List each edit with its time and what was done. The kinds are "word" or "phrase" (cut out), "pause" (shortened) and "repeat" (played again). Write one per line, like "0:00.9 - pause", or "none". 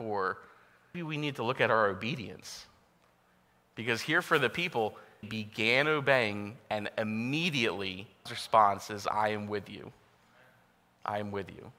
0:00.9 - word
0:05.2 - word
0:08.3 - word

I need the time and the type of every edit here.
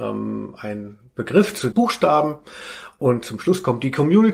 0:01.7 - word

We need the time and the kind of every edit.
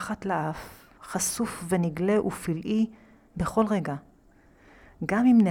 none

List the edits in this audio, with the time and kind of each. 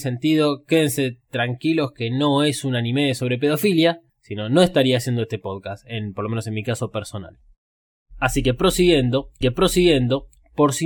0:04.1 - pause
0:09.4 - repeat

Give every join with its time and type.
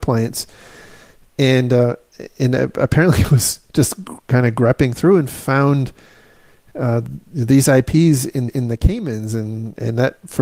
0:08.5 - repeat

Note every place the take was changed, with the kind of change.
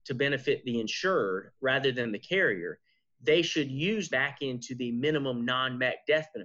0:04.1 - phrase

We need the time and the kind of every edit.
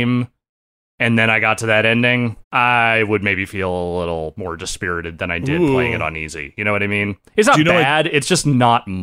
0:02.4 - pause

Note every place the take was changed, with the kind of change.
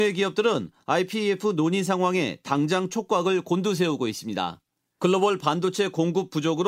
none

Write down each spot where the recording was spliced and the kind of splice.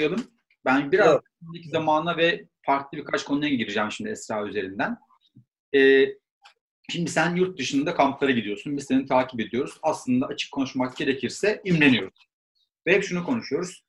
none

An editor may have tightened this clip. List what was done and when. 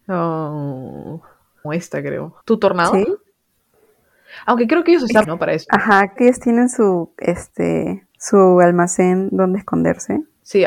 0:01.6 - phrase
0:02.4 - pause
0:05.2 - word
0:06.2 - word
0:08.1 - pause

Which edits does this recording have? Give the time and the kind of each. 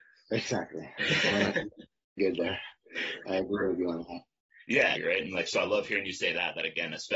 0:02.2 - word
0:05.0 - word

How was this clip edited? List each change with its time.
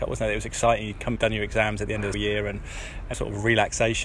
0:01.2 - word
0:02.1 - word
0:03.1 - word

